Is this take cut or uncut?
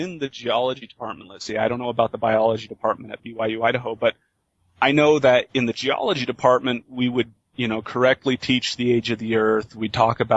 uncut